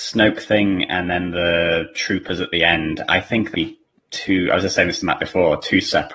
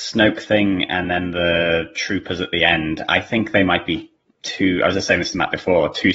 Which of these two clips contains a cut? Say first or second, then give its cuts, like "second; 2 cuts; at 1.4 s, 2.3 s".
first; 1 cut; at 3.5 s